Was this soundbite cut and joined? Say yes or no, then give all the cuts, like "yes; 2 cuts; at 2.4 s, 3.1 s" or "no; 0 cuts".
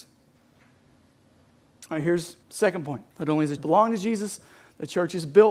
yes; 3 cuts; at 2.4 s, 3.1 s, 3.6 s